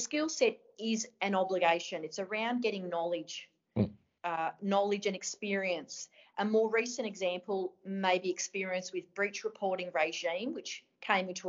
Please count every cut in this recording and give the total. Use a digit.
0